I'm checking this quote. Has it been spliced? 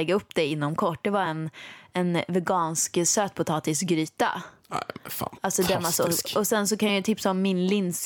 no; 0 cuts

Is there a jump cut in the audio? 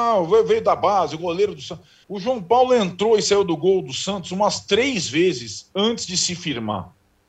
yes; 1 cut; at 2.0 s

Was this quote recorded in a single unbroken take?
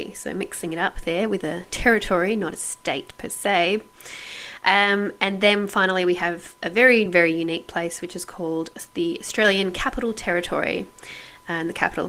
yes; 0 cuts

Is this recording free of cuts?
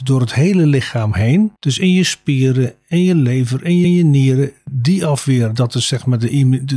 no; 2 cuts; at 1.6 s, 3.8 s

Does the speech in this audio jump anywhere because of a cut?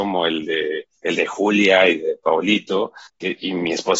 yes; 2 cuts; at 1.0 s, 3.1 s

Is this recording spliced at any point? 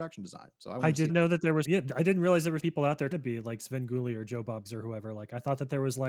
yes; 5 cuts; at 1.1 s, 1.6 s, 2.6 s, 3.1 s, 4.6 s

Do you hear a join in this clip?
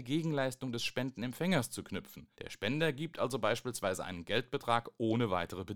yes; 1 cut; at 2.3 s

